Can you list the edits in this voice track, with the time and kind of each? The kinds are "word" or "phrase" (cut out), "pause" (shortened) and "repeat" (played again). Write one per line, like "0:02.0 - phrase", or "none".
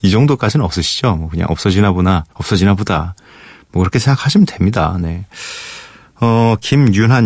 0:02.3 - pause

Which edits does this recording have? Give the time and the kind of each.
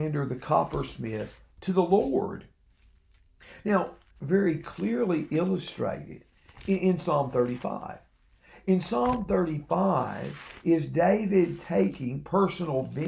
0:04.1 - phrase

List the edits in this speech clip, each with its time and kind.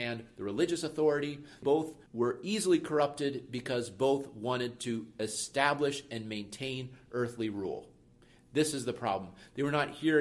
none

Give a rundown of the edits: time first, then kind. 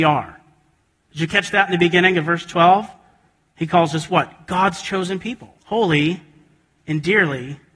0:05.6 - pause

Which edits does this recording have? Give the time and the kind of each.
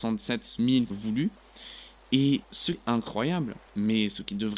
0:00.9 - word
0:02.7 - word
0:03.7 - pause

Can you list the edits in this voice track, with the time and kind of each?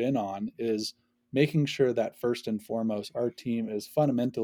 none

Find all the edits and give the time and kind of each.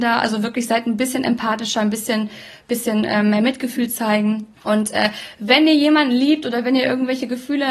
0:04.5 - pause

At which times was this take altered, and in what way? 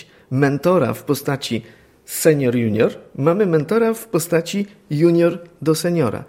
none

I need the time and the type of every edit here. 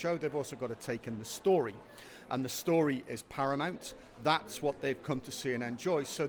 none

